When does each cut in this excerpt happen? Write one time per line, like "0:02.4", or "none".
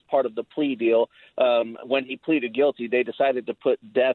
none